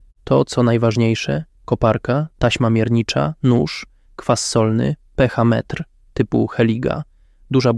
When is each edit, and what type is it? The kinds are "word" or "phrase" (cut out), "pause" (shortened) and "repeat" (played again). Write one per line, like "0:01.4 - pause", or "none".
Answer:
none